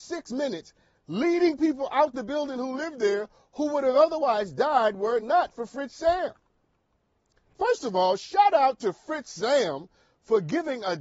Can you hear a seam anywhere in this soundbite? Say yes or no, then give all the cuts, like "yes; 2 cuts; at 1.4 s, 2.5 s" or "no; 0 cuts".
no; 0 cuts